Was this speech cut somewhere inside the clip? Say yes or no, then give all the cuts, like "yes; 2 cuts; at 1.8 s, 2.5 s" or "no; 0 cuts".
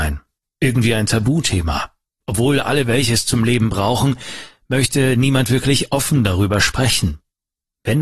no; 0 cuts